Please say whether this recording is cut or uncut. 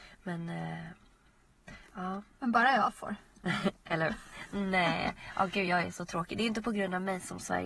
uncut